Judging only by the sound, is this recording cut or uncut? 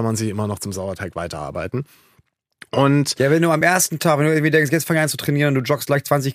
uncut